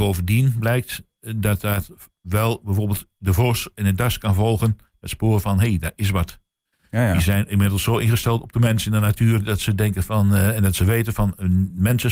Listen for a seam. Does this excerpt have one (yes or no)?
no